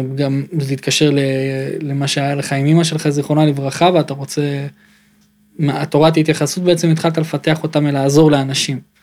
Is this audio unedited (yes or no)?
yes